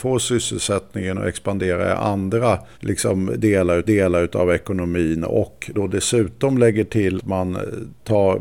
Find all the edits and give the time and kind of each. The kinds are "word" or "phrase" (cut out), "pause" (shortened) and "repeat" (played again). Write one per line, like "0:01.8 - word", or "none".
0:02.7 - pause
0:03.8 - repeat
0:05.7 - word
0:07.2 - word